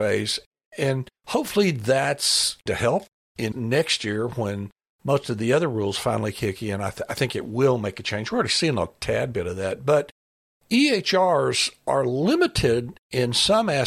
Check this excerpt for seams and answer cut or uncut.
cut